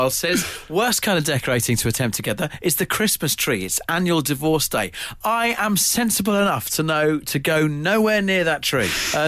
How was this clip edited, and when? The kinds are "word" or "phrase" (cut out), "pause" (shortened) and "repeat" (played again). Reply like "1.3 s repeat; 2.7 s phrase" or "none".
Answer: none